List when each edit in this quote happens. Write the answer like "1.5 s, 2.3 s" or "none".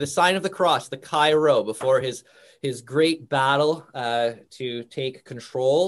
none

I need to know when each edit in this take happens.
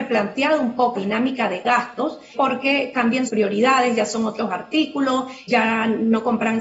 0.9 s, 2.3 s, 3.3 s, 5.5 s

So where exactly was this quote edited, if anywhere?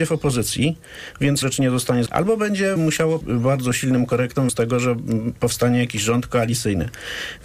1.4 s, 2.1 s, 2.8 s, 3.2 s, 4.5 s

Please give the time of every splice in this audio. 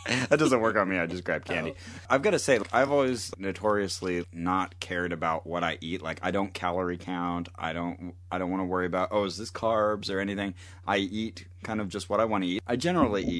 none

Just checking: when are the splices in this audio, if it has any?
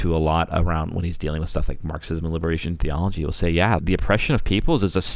3.8 s

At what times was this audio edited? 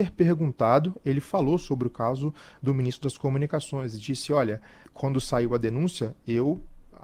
4.8 s

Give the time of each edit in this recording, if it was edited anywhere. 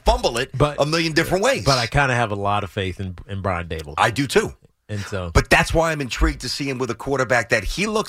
none

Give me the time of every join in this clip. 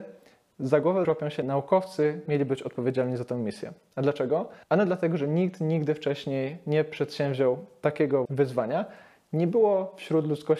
1.0 s, 2.3 s, 4.6 s, 8.3 s

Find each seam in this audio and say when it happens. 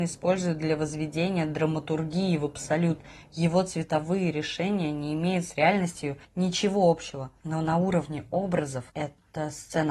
6.2 s, 8.9 s

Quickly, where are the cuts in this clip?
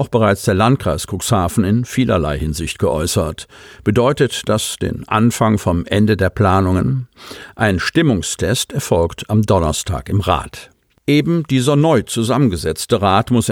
none

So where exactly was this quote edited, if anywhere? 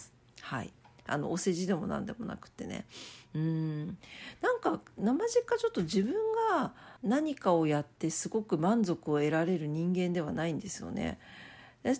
7.0 s

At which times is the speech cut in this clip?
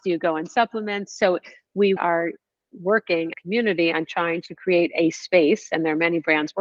2.0 s, 3.3 s

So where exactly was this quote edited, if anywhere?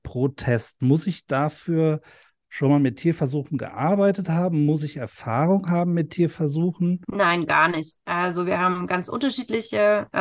none

